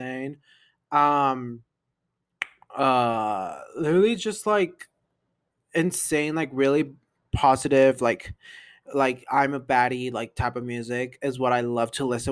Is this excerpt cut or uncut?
uncut